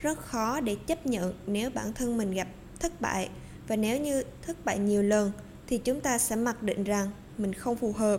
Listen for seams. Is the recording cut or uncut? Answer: uncut